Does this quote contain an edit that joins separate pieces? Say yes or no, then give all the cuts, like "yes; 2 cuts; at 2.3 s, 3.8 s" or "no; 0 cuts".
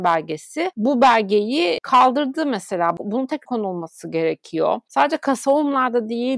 yes; 1 cut; at 3.4 s